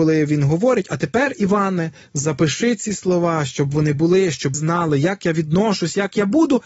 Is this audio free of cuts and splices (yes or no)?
no